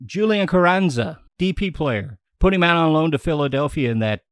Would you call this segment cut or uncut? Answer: cut